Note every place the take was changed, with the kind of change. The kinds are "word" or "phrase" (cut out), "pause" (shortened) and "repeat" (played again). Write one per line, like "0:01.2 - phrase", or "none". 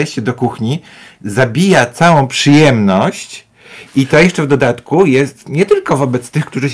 none